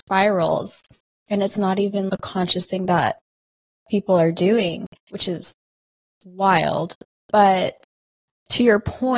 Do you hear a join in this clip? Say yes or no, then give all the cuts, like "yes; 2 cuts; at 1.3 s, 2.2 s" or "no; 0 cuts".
yes; 1 cut; at 5.0 s